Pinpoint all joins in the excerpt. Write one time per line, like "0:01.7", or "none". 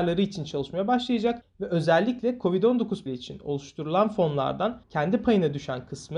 0:03.1